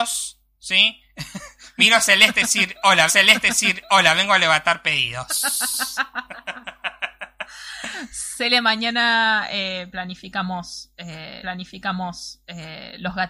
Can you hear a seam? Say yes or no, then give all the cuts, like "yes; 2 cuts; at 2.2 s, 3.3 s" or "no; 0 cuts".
yes; 2 cuts; at 3.1 s, 11.4 s